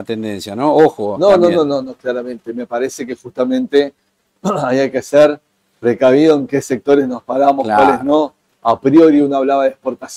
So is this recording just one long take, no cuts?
yes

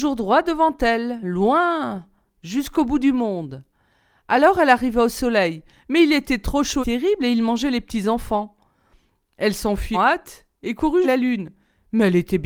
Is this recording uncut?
no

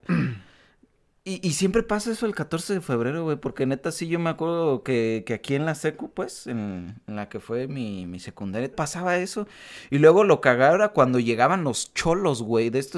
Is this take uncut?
no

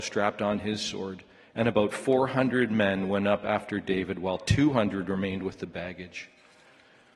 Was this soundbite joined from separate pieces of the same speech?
no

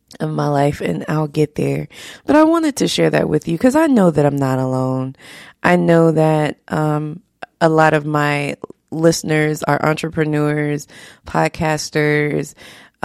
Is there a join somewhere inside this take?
no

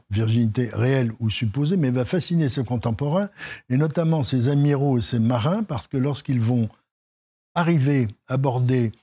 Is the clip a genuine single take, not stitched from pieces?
yes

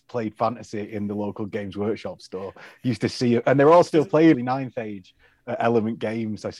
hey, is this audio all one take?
no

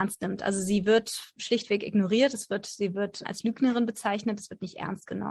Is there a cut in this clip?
yes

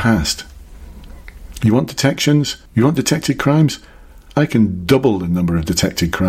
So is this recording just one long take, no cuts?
no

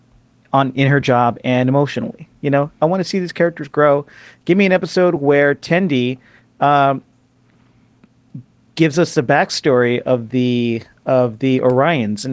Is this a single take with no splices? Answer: yes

